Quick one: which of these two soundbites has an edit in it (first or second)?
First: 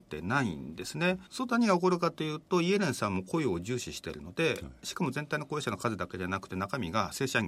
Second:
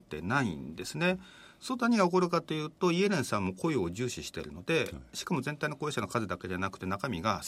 first